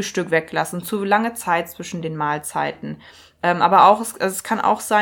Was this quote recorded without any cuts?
yes; 0 cuts

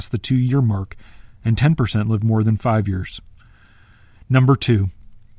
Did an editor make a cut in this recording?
no; 0 cuts

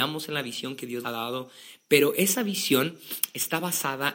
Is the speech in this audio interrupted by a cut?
yes; 1 cut; at 1.0 s

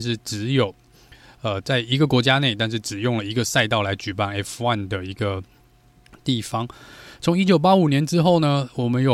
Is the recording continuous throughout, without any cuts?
yes; 0 cuts

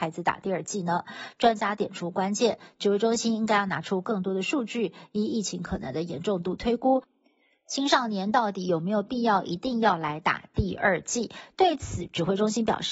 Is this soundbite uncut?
yes; 0 cuts

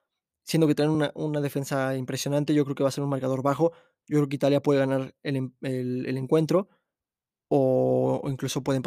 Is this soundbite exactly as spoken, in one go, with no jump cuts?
yes; 0 cuts

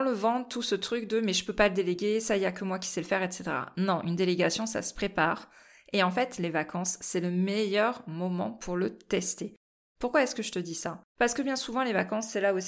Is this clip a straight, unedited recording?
no; 1 cut; at 11.1 s

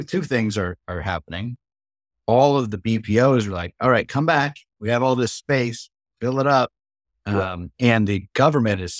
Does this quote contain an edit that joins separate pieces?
no; 0 cuts

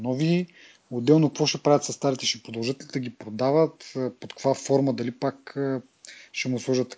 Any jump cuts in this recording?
no; 0 cuts

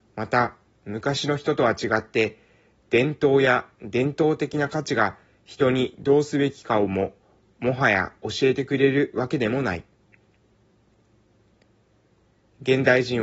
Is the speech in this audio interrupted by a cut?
no; 0 cuts

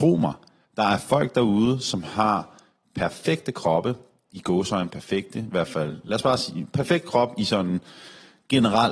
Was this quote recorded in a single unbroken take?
yes; 0 cuts

